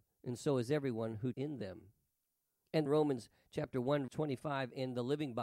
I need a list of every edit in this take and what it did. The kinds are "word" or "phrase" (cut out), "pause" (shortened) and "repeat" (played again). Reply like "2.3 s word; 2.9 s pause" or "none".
1.3 s word; 2.9 s word; 4.1 s word